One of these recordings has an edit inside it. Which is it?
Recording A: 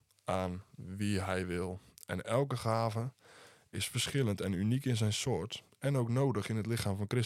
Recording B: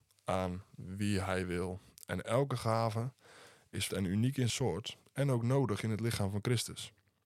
B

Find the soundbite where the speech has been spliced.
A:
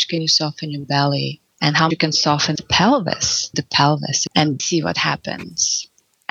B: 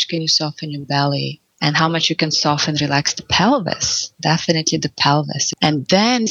A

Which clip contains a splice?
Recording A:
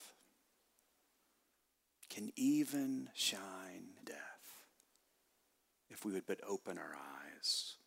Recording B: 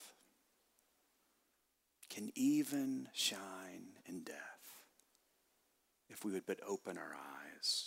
A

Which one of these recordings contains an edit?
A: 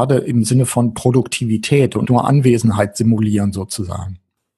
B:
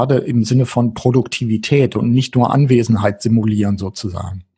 A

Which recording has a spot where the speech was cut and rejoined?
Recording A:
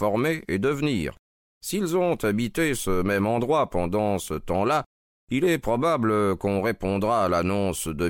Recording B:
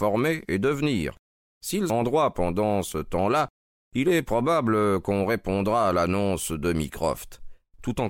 B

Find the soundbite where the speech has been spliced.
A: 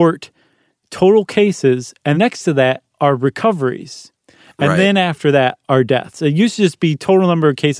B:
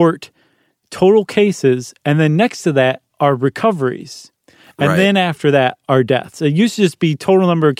A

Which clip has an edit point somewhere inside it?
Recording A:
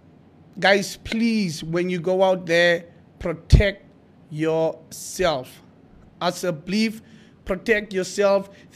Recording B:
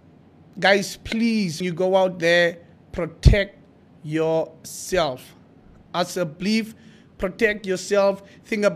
B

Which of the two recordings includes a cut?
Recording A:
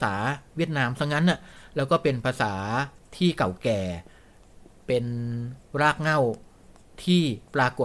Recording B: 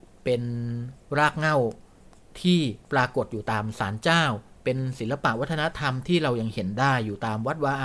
A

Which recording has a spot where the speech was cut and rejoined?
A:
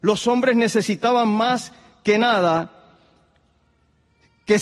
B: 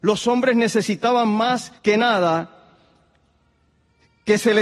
B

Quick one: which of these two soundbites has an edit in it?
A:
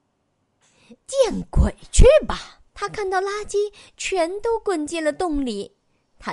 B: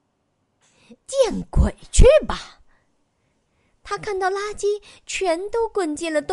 A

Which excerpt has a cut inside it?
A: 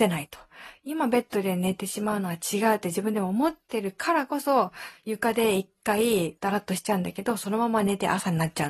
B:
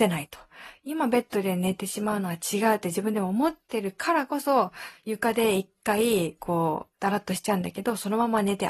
A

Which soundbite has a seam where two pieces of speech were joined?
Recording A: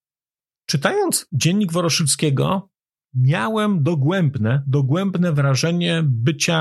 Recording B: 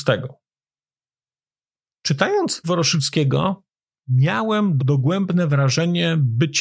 B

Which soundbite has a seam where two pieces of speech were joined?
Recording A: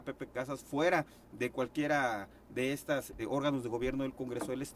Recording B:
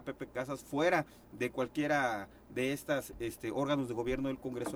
A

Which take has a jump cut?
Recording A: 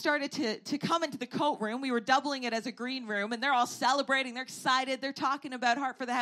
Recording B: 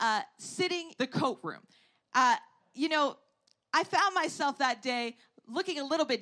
B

